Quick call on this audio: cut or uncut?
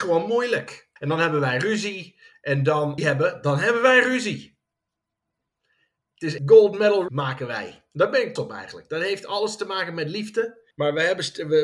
cut